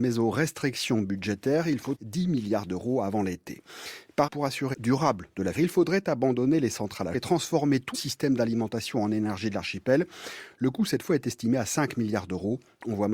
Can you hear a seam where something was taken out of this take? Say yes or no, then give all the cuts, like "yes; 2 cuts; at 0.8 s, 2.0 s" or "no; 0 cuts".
yes; 6 cuts; at 1.9 s, 4.3 s, 4.7 s, 5.5 s, 7.1 s, 7.9 s